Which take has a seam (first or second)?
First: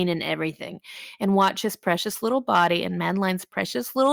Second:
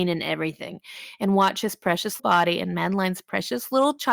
second